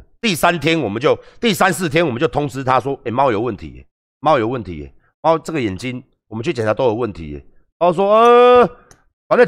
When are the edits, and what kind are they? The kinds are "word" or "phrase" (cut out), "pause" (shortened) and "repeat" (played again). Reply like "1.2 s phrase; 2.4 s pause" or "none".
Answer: none